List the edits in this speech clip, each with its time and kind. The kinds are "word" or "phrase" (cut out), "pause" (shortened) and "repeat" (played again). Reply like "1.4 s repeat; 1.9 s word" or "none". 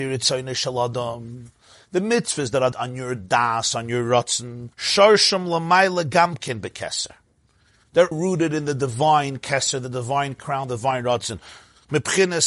2.7 s word; 4.7 s pause; 8.1 s word